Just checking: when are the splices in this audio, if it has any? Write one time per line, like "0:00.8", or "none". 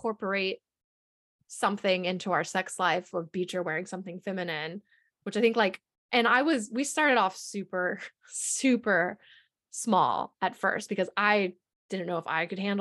none